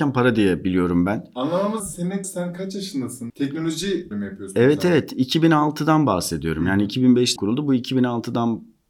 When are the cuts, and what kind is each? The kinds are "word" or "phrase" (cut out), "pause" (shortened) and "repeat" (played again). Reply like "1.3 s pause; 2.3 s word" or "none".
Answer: 1.8 s word; 2.2 s word; 3.3 s word; 4.1 s word; 7.4 s word